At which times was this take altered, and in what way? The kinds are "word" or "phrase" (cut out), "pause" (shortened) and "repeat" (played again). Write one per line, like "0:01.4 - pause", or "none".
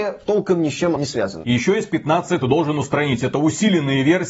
0:01.0 - word
0:02.4 - phrase

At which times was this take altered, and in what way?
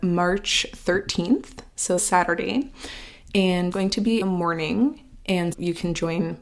0:02.0 - phrase
0:03.7 - word
0:04.2 - word
0:05.5 - word

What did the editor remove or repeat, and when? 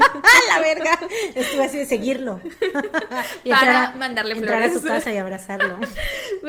none

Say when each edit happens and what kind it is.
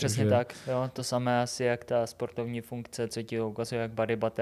none

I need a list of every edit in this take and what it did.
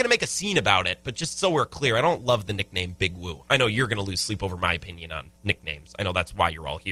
0:05.4 - pause

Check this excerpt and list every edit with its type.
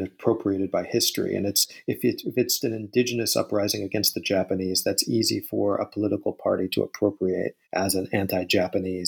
0:02.6 - word
0:07.6 - pause

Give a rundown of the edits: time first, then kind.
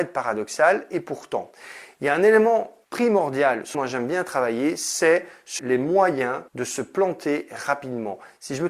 0:02.8 - pause
0:03.7 - word
0:05.6 - word
0:06.5 - pause

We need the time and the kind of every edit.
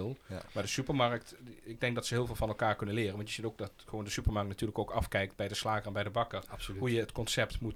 none

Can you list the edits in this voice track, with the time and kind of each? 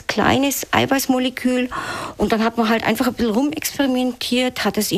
none

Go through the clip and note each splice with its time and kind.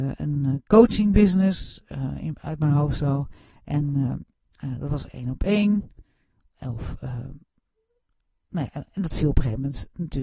none

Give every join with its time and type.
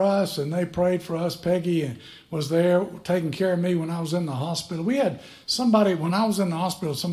none

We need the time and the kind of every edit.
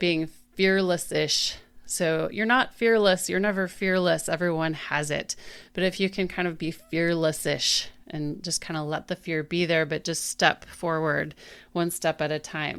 none

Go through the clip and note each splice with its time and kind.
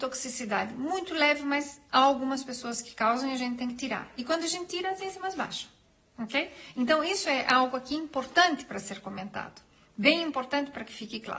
none

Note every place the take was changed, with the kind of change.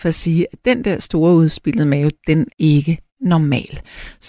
0:02.5 - word

